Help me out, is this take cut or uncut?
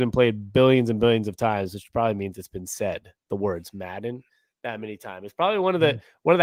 uncut